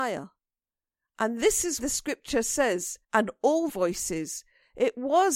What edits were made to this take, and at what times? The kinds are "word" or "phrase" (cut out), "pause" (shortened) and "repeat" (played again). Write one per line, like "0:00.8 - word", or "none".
0:01.8 - word
0:03.0 - pause
0:03.7 - phrase